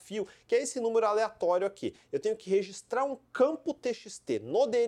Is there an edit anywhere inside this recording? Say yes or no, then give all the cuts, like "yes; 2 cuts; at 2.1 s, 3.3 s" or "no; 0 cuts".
no; 0 cuts